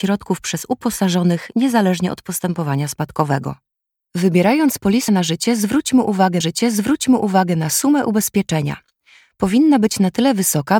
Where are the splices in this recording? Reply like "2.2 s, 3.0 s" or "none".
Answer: 3.8 s, 5.1 s, 6.4 s

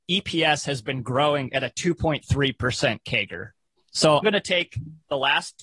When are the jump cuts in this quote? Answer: 4.2 s

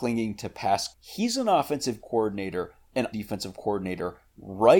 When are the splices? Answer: 0.9 s, 2.0 s, 3.1 s

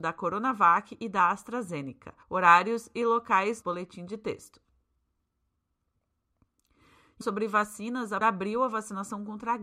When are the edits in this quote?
2.2 s, 3.6 s, 7.2 s, 8.2 s

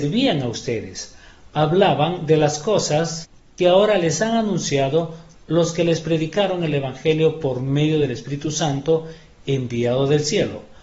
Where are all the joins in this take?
none

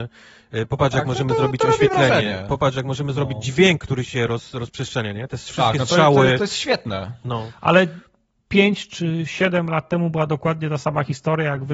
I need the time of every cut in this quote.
none

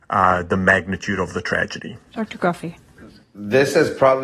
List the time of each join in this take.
2.1 s

